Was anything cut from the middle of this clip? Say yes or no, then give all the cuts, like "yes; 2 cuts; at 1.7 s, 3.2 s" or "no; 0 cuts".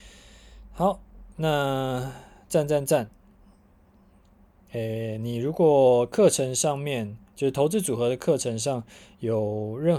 no; 0 cuts